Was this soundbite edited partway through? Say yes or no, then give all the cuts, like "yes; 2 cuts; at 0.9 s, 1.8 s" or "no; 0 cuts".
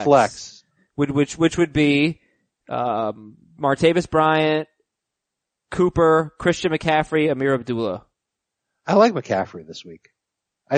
no; 0 cuts